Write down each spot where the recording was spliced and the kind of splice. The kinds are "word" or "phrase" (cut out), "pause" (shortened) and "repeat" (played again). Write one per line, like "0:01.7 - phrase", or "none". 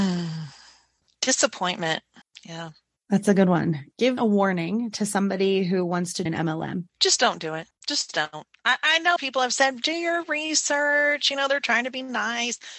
0:02.2 - pause
0:04.2 - word
0:06.3 - word
0:06.9 - pause
0:07.7 - pause
0:09.2 - word

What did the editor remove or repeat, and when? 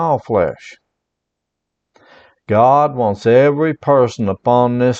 none

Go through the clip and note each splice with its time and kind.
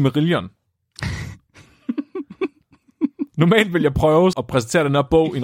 0:04.3 - word

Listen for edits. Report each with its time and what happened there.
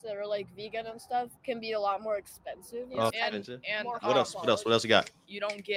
0:01.4 - pause
0:03.1 - word

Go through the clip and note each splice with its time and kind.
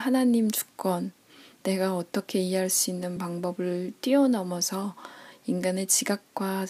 none

